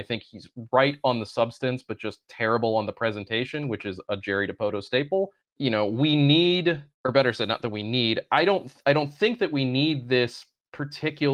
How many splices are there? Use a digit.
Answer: 2